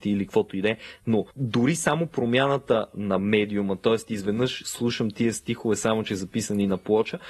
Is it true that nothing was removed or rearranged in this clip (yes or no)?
no